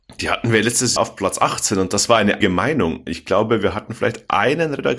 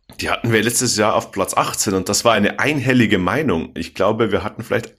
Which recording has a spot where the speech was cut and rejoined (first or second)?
first